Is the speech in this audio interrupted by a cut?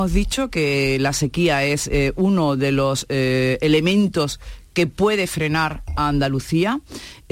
no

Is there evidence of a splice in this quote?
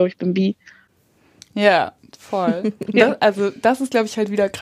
no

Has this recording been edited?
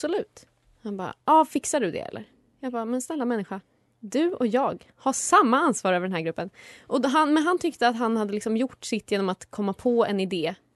no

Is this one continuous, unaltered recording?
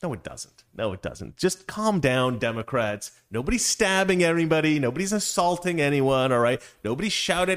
yes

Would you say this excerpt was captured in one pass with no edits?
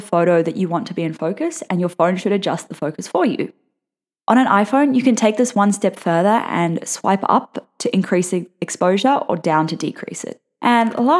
yes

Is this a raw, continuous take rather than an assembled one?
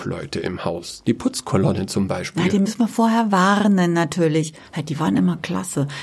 yes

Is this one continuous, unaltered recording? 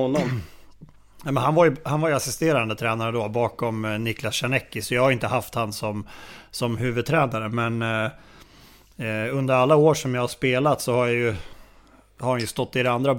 yes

